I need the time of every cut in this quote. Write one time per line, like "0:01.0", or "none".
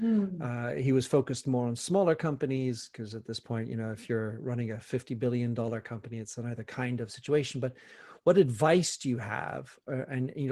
none

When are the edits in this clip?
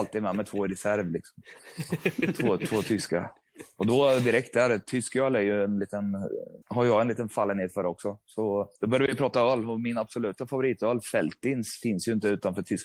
0:06.6
0:08.8

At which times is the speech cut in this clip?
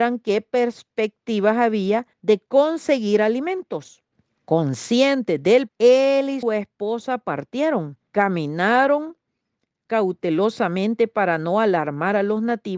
0:02.1
0:04.1
0:05.7
0:06.4
0:08.1

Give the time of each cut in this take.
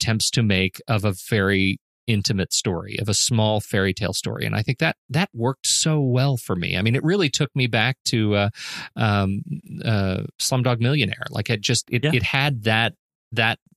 none

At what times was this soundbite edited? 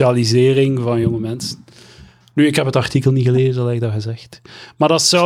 none

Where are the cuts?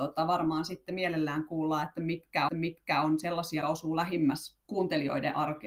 0:02.5
0:03.6
0:04.6

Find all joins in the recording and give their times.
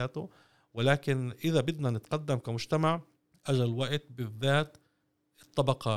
0:03.2

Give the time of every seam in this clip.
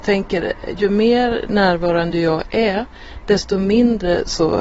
none

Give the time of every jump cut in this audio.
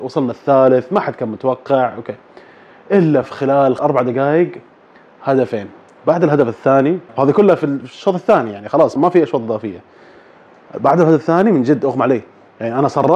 0:03.2
0:03.8
0:07.1
0:09.0

